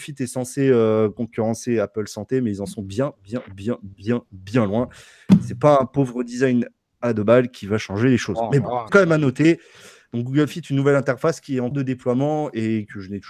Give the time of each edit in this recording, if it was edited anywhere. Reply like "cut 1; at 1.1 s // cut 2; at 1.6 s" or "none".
cut 1; at 8.9 s // cut 2; at 11.7 s